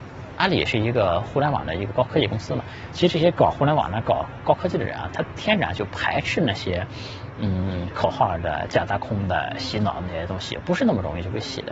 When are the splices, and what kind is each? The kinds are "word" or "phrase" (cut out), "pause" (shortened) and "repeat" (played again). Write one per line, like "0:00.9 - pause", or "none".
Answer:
none

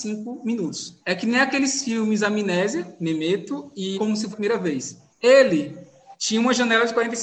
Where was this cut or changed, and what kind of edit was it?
0:01.0 - pause
0:03.9 - word
0:04.3 - word
0:05.1 - pause

